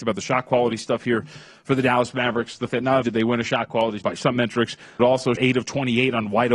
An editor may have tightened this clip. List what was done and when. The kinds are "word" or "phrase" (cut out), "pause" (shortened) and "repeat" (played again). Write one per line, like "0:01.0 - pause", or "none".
0:02.7 - word
0:03.0 - word
0:04.0 - word
0:05.0 - word
0:05.4 - word